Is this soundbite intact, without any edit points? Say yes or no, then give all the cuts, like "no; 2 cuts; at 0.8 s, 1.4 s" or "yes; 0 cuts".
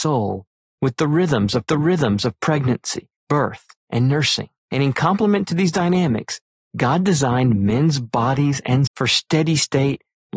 no; 3 cuts; at 1.7 s, 4.6 s, 8.9 s